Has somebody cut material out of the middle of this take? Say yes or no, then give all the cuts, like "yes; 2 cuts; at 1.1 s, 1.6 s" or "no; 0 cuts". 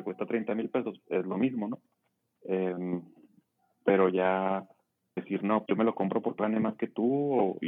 yes; 4 cuts; at 1.9 s, 5.2 s, 5.7 s, 6.4 s